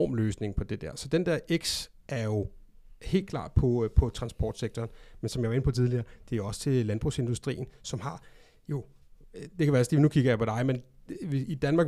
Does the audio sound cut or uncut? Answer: uncut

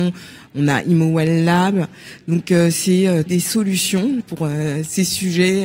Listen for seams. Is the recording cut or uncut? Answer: cut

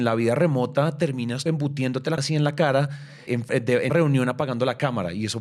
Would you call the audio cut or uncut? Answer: cut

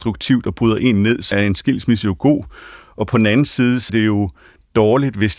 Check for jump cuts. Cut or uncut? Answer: cut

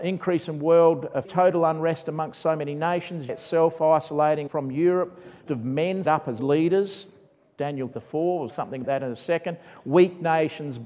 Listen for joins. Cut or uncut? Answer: cut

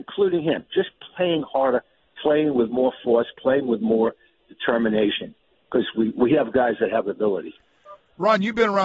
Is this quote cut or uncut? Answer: uncut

